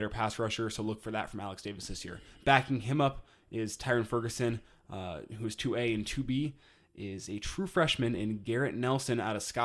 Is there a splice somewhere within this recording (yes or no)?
no